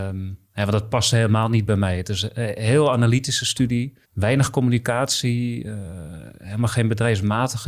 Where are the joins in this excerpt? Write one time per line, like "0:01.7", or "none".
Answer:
0:04.0